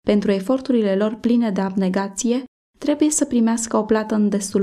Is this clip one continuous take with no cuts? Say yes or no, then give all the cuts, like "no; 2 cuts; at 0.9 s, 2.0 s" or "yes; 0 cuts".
yes; 0 cuts